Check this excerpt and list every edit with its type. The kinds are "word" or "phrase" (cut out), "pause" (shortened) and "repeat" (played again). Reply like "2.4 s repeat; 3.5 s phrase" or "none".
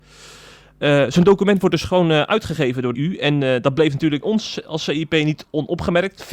2.9 s word; 4.2 s word

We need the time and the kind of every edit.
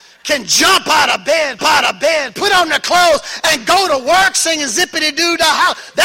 1.6 s repeat

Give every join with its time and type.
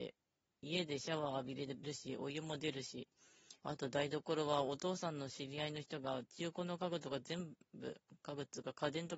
3.6 s pause; 7.6 s pause

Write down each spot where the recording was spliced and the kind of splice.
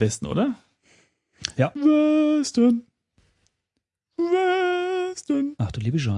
none

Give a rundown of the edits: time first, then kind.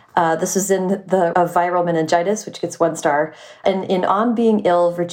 1.3 s word

